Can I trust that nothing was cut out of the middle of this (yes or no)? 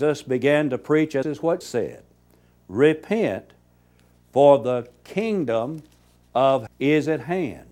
no